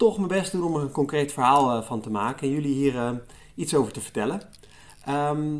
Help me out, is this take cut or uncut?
uncut